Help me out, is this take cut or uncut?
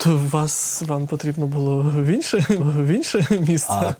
cut